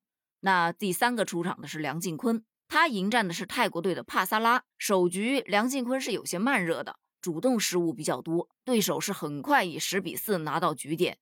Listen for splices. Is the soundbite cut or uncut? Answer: cut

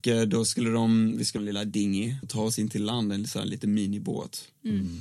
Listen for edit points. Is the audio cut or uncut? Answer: cut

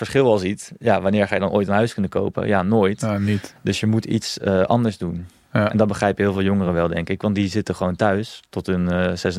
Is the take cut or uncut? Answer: uncut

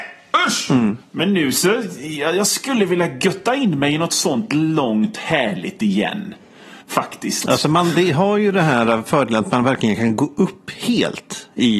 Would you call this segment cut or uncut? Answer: cut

